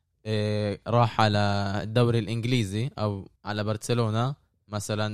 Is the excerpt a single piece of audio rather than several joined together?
no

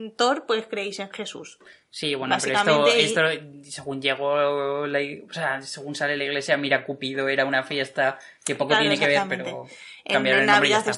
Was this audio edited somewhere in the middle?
no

